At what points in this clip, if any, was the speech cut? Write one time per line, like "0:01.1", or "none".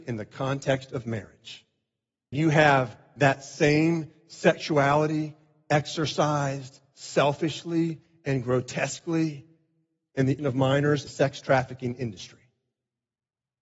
0:02.3
0:10.4
0:11.1